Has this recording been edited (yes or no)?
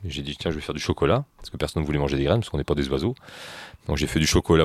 no